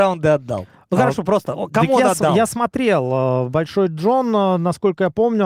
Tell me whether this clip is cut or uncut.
uncut